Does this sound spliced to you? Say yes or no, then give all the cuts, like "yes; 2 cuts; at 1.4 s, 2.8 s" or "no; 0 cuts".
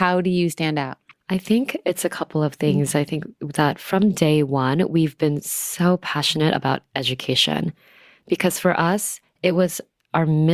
no; 0 cuts